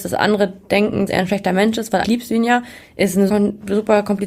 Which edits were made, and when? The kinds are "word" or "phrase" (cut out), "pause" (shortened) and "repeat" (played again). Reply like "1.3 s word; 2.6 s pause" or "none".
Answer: 1.1 s word; 2.0 s word; 3.3 s word